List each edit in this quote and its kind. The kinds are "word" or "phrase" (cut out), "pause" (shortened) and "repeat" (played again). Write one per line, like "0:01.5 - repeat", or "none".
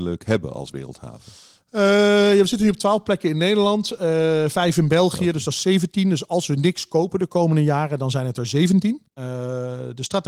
0:09.1 - pause